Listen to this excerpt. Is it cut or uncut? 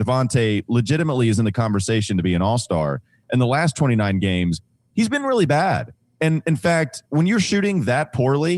uncut